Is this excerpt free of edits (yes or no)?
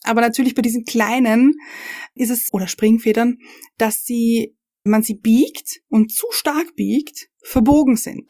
no